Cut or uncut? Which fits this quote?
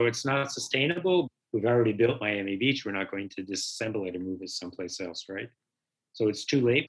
uncut